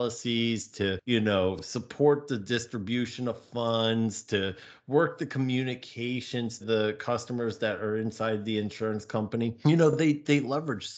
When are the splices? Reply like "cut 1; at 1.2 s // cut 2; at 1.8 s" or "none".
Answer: cut 1; at 6.6 s